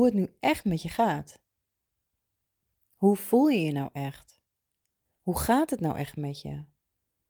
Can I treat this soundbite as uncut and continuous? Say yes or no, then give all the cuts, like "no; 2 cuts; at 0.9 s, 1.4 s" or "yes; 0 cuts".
yes; 0 cuts